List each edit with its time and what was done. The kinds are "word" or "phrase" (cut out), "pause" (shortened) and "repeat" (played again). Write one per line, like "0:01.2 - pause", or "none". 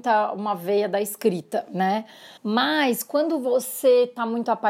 0:02.4 - pause